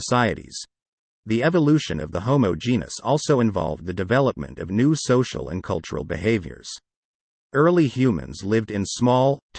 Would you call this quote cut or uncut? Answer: uncut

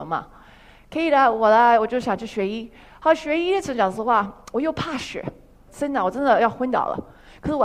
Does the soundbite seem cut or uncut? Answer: uncut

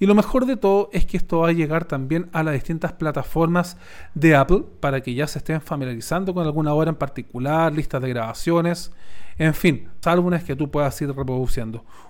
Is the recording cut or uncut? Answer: cut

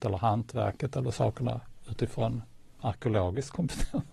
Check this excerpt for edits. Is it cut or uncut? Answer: uncut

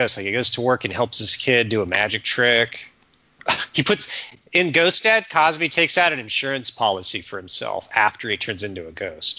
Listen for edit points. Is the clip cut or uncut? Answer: uncut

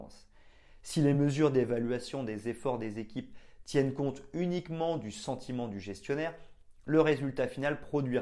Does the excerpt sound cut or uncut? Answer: uncut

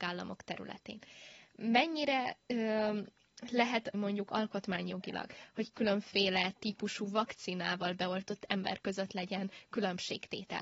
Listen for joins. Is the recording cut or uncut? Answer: cut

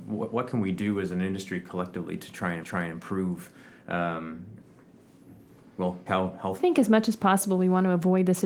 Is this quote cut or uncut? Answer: cut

